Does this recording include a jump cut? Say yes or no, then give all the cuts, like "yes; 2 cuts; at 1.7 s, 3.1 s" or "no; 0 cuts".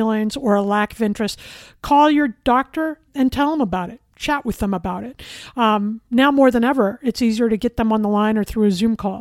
yes; 2 cuts; at 3.1 s, 4.1 s